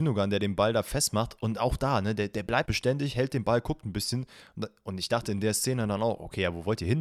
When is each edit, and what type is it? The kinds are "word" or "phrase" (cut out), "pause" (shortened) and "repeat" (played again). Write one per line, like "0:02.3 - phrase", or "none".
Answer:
0:02.6 - word